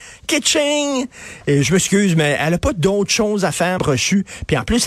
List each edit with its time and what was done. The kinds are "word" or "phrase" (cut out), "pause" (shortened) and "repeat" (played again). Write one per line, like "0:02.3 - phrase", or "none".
0:03.8 - word